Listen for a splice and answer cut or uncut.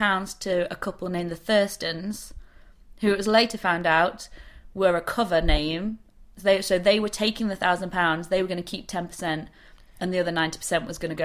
uncut